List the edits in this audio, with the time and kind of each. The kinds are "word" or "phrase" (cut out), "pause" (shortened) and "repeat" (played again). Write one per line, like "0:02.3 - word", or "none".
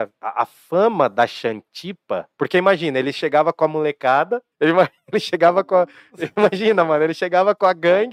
0:02.3 - pause
0:04.5 - pause